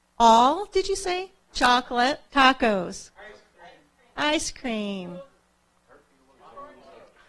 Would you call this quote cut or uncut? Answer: cut